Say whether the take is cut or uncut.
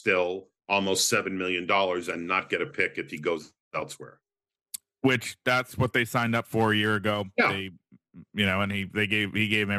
uncut